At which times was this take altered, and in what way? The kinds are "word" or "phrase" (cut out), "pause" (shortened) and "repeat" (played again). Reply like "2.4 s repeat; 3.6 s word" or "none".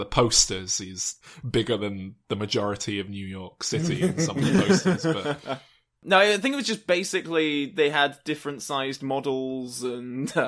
none